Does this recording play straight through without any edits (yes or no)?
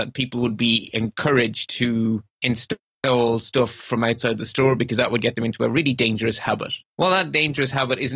no